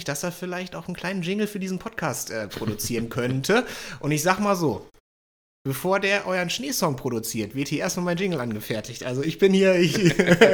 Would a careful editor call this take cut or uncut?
uncut